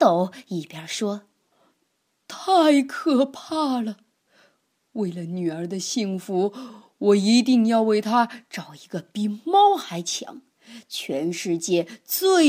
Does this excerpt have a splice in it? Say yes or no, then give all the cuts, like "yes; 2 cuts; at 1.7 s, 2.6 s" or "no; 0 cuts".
no; 0 cuts